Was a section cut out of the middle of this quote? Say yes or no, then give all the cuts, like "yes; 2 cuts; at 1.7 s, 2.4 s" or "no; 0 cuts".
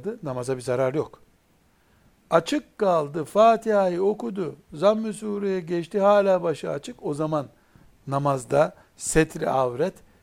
no; 0 cuts